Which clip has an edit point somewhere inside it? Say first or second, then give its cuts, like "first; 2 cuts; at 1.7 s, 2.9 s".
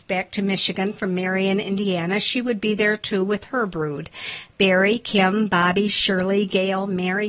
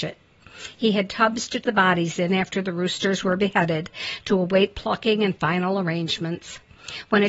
second; 1 cut; at 1.6 s